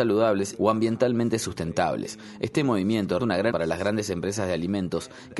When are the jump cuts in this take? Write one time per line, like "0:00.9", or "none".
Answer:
0:03.2
0:03.5